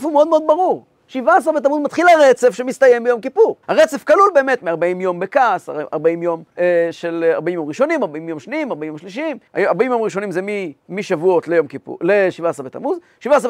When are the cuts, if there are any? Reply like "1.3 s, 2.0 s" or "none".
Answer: 3.6 s, 6.5 s, 9.5 s, 10.8 s